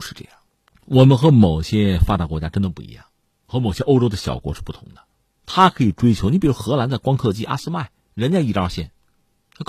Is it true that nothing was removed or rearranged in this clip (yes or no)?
yes